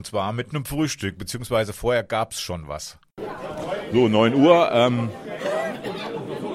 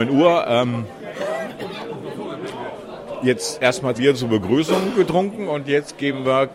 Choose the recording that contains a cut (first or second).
second